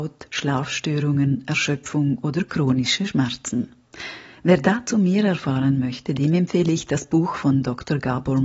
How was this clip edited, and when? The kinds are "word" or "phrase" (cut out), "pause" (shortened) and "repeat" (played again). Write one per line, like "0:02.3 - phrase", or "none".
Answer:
none